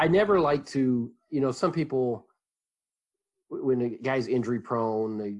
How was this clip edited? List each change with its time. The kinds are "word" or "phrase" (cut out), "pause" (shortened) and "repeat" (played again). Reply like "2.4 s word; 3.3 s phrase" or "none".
none